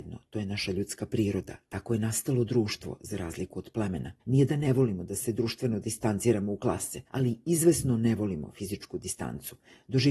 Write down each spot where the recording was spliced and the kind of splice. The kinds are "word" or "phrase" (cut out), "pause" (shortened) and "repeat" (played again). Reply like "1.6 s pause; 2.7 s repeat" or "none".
4.2 s pause; 7.1 s pause